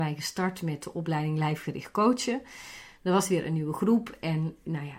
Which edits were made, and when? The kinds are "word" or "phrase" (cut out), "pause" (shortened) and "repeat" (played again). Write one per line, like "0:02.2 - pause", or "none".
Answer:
none